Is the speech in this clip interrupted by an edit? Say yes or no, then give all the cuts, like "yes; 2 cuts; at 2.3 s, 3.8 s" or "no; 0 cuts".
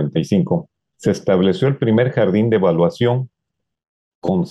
no; 0 cuts